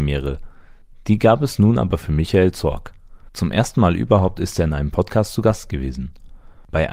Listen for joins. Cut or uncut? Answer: uncut